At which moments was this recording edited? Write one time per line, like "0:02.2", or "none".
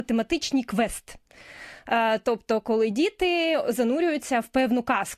none